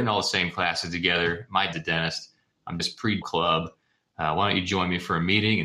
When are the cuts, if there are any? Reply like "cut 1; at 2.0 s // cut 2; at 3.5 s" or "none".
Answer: cut 1; at 1.7 s // cut 2; at 2.8 s // cut 3; at 3.2 s